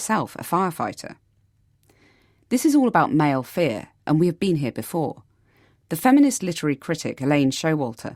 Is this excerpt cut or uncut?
uncut